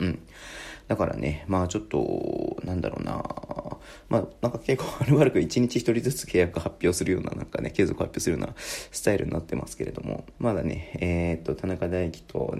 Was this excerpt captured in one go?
no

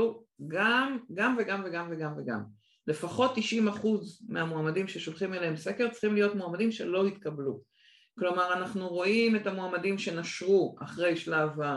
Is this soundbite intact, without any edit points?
yes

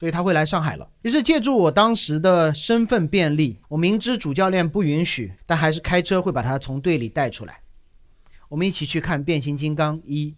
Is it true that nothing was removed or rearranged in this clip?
no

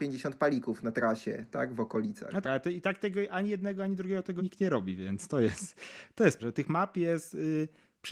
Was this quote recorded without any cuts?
no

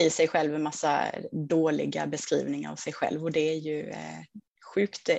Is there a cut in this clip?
no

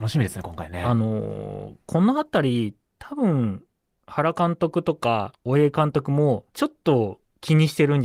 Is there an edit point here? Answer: yes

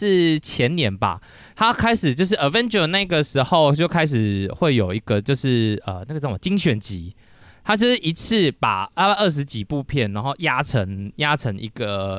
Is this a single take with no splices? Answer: yes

